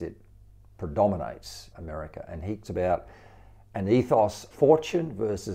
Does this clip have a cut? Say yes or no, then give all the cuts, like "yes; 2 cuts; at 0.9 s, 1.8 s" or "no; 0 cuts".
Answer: yes; 3 cuts; at 1.7 s, 2.6 s, 4.5 s